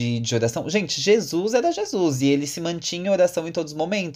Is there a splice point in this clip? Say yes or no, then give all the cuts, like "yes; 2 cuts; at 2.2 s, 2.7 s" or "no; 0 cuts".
no; 0 cuts